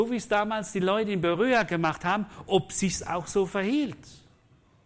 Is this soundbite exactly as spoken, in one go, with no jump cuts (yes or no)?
yes